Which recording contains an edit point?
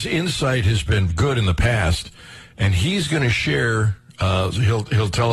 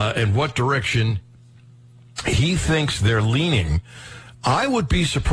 first; 1 cut; at 1.1 s

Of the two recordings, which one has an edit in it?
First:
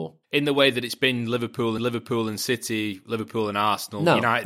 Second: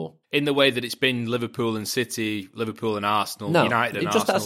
first; 1 cut; at 1.8 s

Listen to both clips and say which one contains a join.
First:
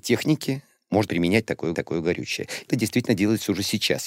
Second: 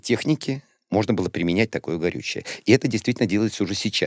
first; 3 cuts; at 1.1 s, 1.7 s, 2.7 s

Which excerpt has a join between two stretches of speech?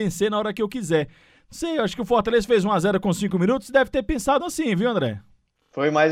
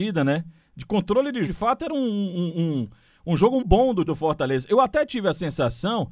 second; 3 cuts; at 1.5 s, 3.6 s, 4.1 s

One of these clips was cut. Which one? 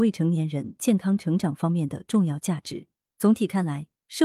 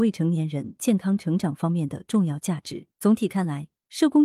second; 1 cut; at 2.9 s

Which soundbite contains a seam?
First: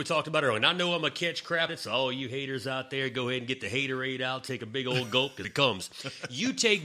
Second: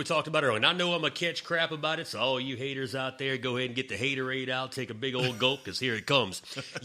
first; 2 cuts; at 1.7 s, 5.4 s

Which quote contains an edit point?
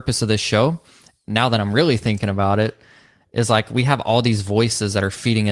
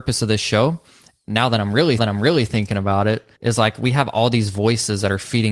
second; 2 cuts; at 2.0 s, 3.3 s

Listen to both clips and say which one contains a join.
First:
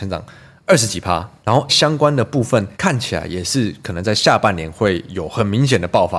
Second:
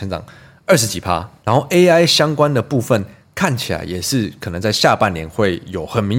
first; 2 cuts; at 1.7 s, 2.7 s

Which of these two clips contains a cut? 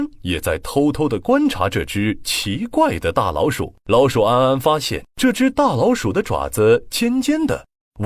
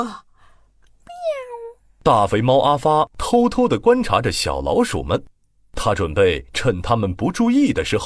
first; 2 cuts; at 3.8 s, 5.1 s

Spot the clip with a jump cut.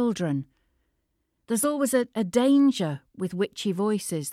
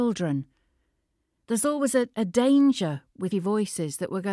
second; 1 cut; at 3.3 s

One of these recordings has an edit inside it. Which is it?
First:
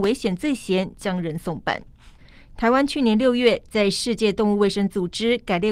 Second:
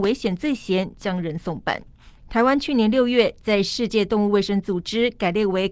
second; 1 cut; at 2.2 s

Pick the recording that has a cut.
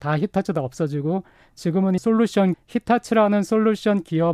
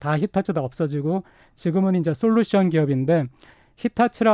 first; 2 cuts; at 2.0 s, 2.5 s

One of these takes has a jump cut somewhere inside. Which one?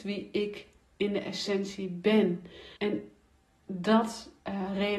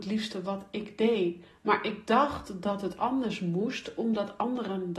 first; 1 cut; at 2.8 s

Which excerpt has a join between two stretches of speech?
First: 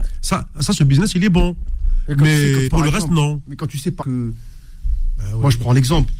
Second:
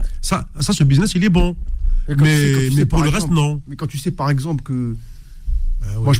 first; 2 cuts; at 2.7 s, 4.0 s

